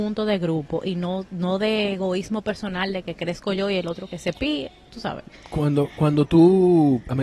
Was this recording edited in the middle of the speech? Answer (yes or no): no